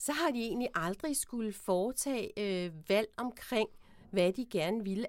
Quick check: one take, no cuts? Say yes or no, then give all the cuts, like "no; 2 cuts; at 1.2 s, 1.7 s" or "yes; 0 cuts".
yes; 0 cuts